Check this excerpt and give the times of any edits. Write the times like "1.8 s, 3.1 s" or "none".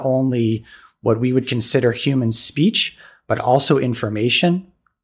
none